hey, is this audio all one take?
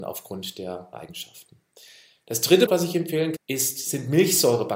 no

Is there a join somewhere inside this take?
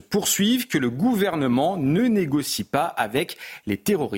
no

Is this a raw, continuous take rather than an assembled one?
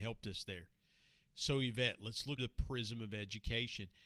no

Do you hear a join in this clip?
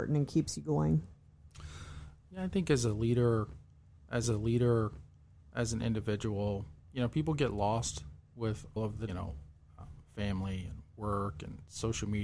yes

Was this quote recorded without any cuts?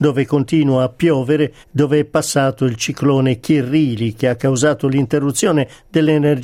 no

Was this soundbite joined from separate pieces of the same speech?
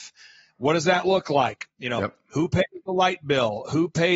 no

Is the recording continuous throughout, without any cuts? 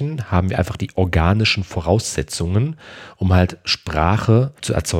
yes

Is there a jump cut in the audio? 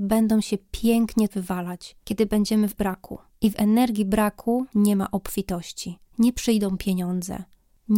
yes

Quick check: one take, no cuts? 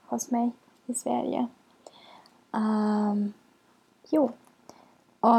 yes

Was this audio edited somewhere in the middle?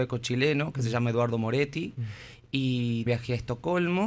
yes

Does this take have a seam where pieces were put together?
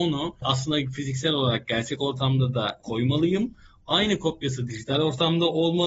no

